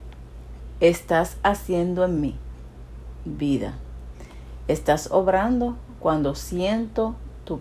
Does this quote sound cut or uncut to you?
uncut